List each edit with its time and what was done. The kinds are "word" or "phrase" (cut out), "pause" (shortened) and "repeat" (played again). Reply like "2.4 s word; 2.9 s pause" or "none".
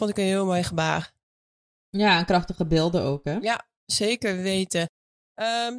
none